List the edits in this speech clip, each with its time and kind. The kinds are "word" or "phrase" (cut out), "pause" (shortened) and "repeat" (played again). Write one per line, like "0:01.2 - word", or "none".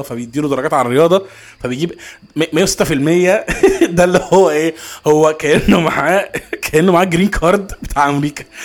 none